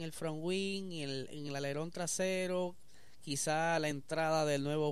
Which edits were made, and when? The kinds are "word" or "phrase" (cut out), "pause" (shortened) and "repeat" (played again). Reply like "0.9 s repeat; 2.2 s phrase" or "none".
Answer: none